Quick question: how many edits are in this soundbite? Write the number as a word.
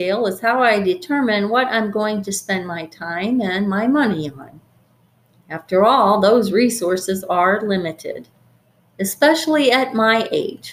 zero